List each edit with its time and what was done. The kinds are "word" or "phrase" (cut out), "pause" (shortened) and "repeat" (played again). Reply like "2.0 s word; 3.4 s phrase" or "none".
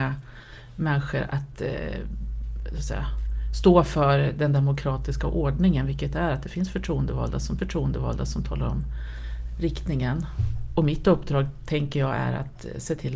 7.6 s repeat